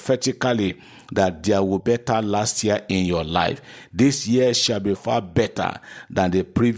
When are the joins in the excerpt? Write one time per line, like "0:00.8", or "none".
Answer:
0:01.8
0:05.0